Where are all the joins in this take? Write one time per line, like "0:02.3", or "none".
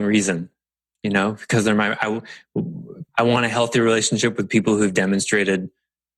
0:03.1

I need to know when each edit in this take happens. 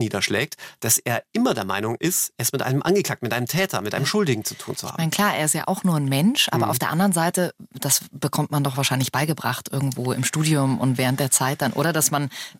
none

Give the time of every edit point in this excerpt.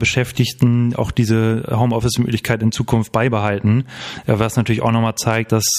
none

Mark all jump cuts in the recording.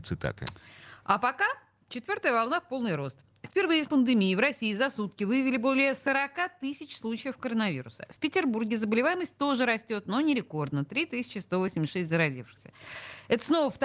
0:03.9

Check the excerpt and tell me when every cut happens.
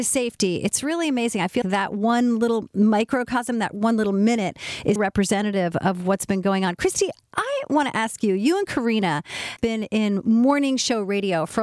0:01.6
0:05.0
0:09.6

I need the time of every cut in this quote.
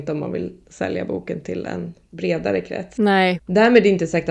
none

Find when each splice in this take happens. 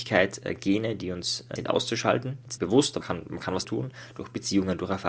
0:01.6
0:02.6
0:03.0
0:03.6

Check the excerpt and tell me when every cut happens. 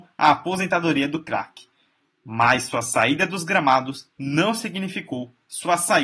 none

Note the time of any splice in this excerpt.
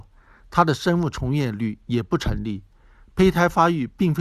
none

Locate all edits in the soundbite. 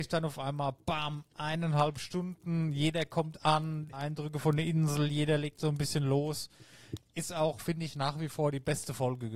0:03.9

